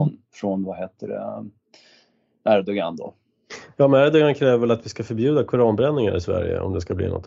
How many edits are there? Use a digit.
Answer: 0